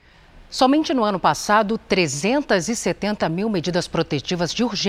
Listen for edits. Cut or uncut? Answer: uncut